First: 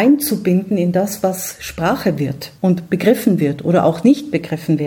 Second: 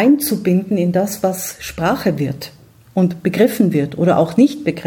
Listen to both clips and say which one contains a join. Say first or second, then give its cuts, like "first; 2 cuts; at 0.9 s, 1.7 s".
first; 1 cut; at 2.6 s